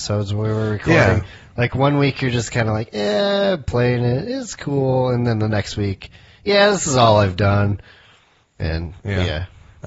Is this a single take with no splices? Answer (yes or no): yes